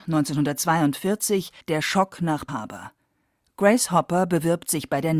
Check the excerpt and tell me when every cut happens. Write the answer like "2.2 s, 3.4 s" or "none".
1.6 s, 2.5 s

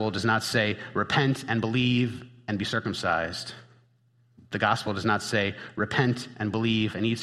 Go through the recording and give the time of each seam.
none

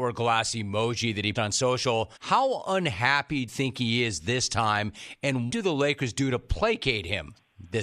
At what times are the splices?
1.3 s, 2.2 s, 3.5 s, 5.5 s

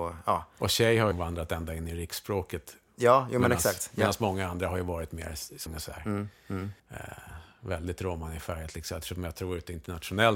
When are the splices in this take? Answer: 1.1 s, 5.7 s, 6.8 s

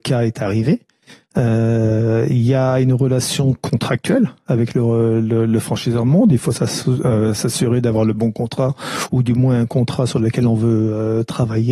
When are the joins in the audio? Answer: none

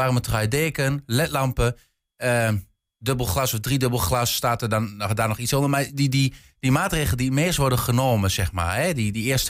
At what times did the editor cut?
none

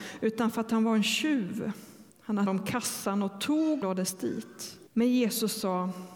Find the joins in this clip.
2.1 s, 2.5 s, 3.8 s, 4.9 s

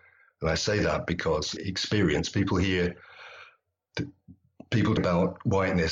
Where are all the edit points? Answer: 1.6 s, 5.0 s

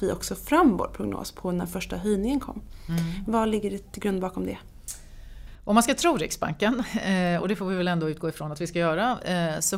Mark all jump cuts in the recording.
none

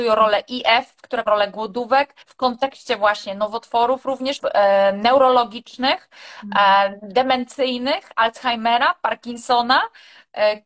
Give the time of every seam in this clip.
1.3 s, 2.2 s, 4.4 s

